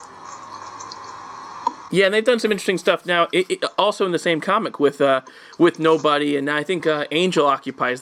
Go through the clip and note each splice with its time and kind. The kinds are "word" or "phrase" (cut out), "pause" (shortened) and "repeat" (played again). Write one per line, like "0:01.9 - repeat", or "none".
none

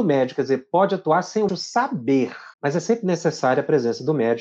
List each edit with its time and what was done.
0:01.5 - word
0:02.5 - pause

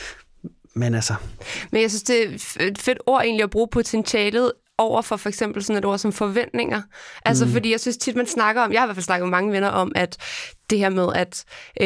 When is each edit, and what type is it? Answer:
none

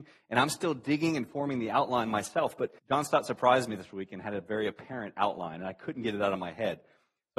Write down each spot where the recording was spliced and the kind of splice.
0:02.8 - pause

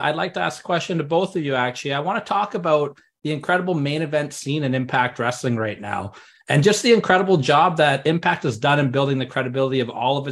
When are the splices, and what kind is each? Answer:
none

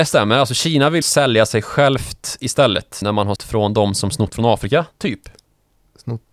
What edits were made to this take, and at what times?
0:01.0 - word
0:03.0 - word
0:03.4 - word

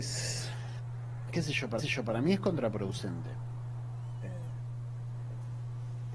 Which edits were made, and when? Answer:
0:01.3 - word
0:01.8 - repeat

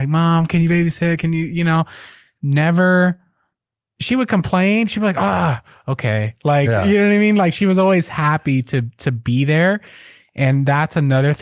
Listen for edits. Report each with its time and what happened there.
none

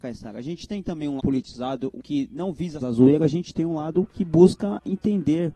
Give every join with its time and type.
0:01.2 - word
0:02.0 - word
0:02.8 - phrase

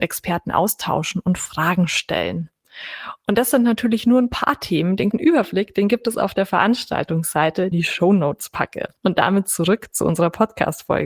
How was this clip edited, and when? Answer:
0:05.1 - word
0:07.7 - phrase
0:09.0 - pause

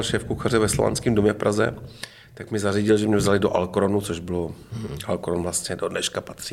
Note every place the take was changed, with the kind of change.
none

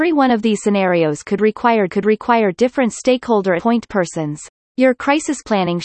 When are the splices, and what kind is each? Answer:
0:01.9 - repeat
0:03.6 - phrase
0:04.6 - pause

